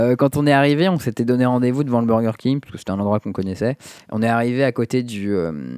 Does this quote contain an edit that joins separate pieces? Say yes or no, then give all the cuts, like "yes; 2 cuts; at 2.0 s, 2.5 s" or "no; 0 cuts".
no; 0 cuts